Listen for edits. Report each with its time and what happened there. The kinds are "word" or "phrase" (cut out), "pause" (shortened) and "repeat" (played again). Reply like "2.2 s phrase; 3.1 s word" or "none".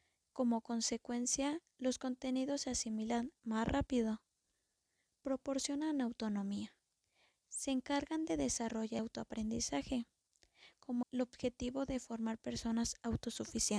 9.0 s word; 11.0 s word